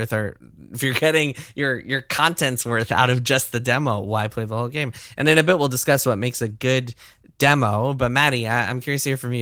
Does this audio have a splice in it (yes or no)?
no